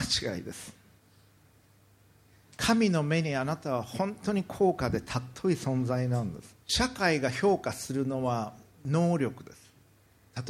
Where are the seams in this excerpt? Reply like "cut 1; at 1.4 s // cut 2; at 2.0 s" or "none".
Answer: cut 1; at 6.6 s